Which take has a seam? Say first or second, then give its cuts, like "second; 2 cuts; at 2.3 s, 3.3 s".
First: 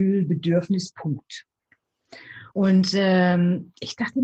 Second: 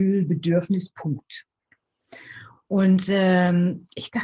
first; 1 cut; at 2.5 s